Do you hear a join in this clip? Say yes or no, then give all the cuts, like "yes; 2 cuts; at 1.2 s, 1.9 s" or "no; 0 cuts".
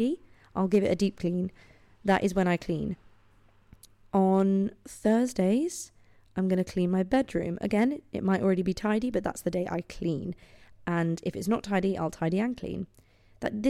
no; 0 cuts